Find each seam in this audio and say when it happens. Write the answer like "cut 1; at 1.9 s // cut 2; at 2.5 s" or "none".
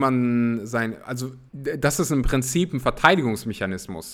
cut 1; at 1.5 s